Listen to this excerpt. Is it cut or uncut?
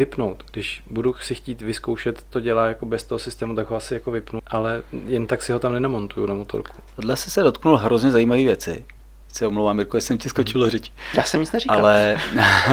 cut